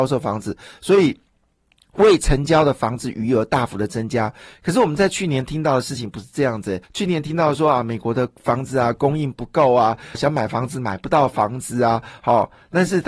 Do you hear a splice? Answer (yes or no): yes